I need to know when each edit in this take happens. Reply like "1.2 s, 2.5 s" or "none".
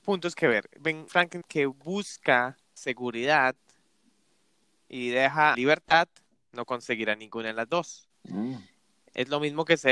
1.1 s, 1.4 s, 2.8 s, 5.5 s